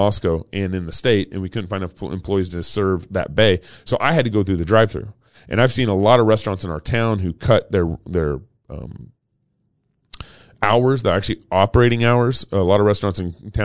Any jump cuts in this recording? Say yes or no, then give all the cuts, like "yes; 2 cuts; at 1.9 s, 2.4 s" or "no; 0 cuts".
no; 0 cuts